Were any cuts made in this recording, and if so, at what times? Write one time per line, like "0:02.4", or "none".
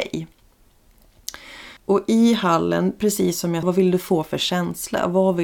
0:01.8
0:03.6